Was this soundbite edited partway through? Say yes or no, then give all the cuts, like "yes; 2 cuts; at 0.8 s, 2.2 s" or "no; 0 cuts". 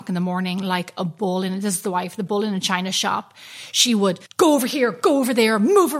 yes; 1 cut; at 4.3 s